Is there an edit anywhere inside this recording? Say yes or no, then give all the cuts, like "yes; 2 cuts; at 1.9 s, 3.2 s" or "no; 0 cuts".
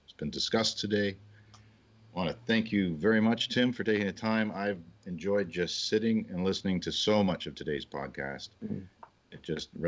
no; 0 cuts